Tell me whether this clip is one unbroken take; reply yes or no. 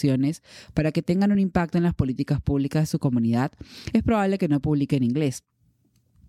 yes